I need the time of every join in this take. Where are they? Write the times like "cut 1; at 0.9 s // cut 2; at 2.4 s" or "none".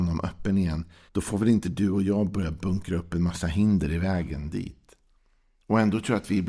cut 1; at 1.1 s